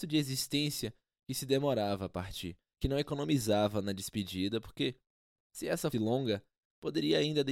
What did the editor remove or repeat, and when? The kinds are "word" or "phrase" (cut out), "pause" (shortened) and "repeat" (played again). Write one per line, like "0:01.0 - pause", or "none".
0:05.9 - word